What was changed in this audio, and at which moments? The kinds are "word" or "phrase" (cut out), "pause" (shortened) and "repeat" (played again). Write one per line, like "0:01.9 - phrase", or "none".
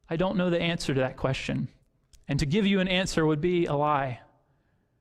none